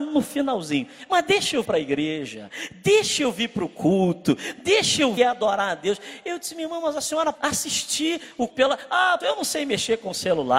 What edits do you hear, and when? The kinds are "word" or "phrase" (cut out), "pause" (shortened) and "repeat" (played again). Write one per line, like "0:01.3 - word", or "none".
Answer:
0:01.6 - word
0:05.2 - word
0:07.3 - word
0:08.5 - word
0:09.2 - word

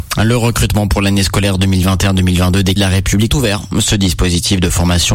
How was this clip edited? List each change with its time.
0:02.8 - word
0:03.3 - phrase

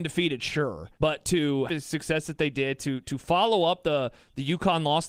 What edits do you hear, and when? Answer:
0:00.9 - pause
0:01.7 - phrase

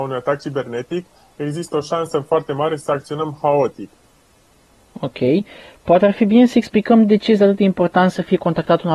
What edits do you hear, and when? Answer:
none

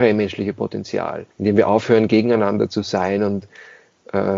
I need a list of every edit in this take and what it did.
0:01.3 - pause

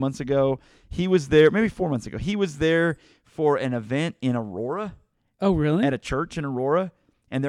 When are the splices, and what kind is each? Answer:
none

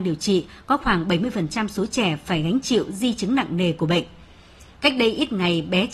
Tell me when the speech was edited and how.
none

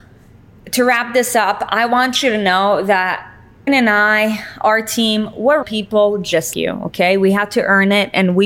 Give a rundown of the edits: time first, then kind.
0:03.7 - word
0:05.6 - word
0:06.5 - word

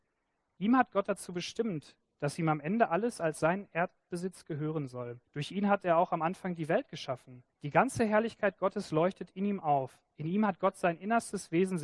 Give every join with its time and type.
0:05.2 - pause
0:07.5 - pause
0:10.1 - pause

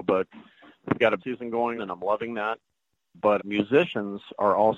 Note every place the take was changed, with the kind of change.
0:01.2 - word
0:01.8 - word
0:03.4 - word

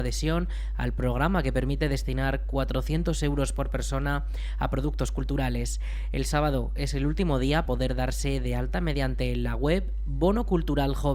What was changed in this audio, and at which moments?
0:07.6 - word

